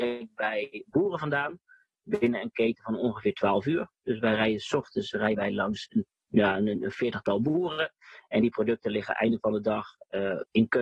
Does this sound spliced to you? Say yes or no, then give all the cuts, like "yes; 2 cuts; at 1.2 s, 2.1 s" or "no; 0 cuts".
no; 0 cuts